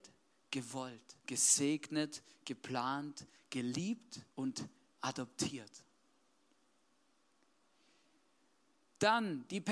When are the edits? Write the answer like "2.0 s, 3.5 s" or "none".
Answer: 1.2 s, 4.3 s